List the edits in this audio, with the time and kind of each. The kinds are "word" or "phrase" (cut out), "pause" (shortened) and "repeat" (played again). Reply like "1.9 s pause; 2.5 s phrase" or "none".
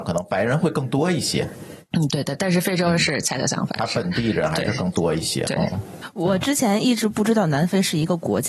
none